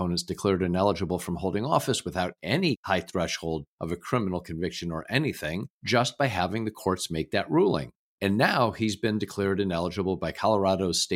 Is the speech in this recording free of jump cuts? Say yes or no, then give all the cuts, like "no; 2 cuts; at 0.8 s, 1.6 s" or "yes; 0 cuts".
yes; 0 cuts